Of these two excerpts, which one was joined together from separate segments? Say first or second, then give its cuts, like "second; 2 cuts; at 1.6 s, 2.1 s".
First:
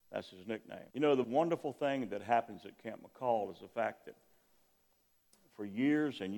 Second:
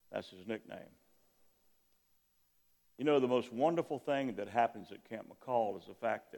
first; 2 cuts; at 0.9 s, 1.2 s